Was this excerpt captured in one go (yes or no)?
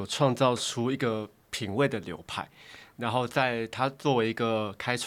no